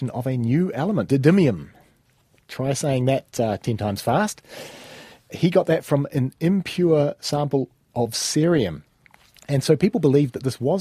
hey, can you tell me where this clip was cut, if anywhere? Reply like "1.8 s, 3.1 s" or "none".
1.1 s